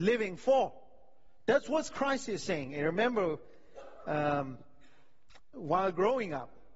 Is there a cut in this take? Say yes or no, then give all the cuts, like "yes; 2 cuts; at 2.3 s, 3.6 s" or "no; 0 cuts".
yes; 1 cut; at 5.5 s